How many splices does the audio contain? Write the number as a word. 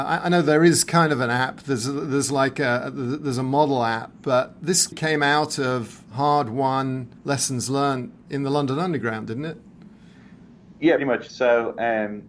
three